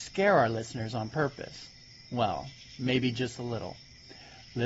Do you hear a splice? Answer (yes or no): no